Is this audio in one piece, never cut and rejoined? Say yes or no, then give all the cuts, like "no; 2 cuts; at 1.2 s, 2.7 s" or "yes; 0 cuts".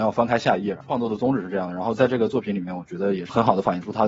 yes; 0 cuts